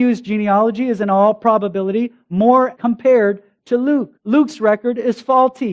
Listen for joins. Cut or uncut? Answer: cut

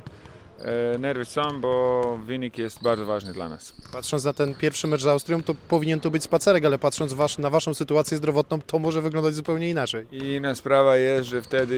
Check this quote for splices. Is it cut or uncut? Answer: uncut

